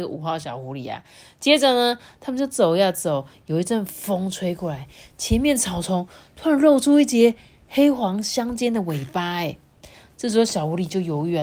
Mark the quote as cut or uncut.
uncut